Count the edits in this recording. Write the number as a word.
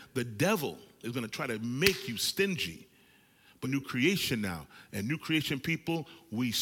one